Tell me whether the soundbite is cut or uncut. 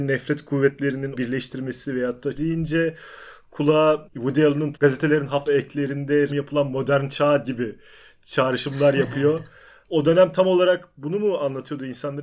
cut